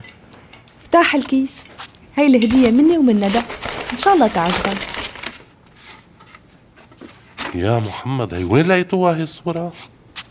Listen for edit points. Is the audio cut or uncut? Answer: uncut